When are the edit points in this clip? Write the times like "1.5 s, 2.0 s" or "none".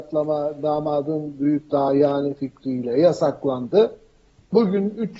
none